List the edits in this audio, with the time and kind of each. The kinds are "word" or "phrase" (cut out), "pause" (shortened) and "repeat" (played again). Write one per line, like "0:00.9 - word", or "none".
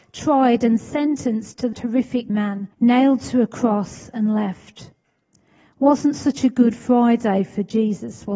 0:01.7 - word
0:02.3 - phrase
0:02.7 - pause